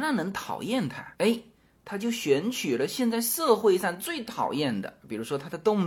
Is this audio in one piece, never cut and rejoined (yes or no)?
yes